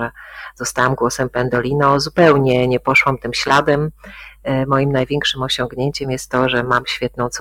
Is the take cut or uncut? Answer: uncut